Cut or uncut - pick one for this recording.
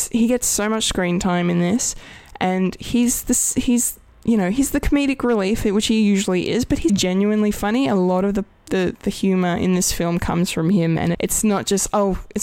cut